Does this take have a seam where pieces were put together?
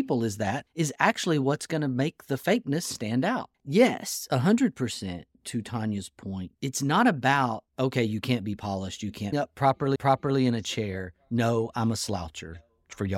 yes; 3 cuts; at 6.5 s, 9.3 s, 10.0 s

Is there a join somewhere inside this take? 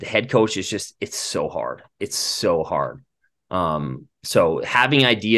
no; 0 cuts

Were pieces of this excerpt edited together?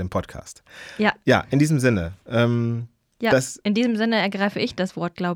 no; 0 cuts

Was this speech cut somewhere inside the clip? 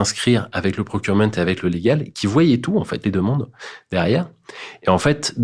yes; 1 cut; at 3.0 s

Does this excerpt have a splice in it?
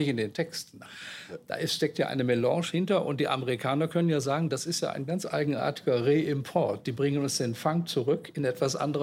no; 0 cuts

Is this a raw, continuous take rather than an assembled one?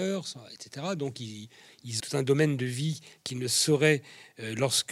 no; 1 cut; at 2.0 s

